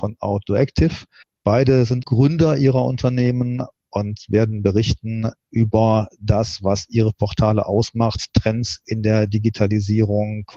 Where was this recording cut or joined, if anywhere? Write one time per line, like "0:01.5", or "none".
0:01.2
0:02.0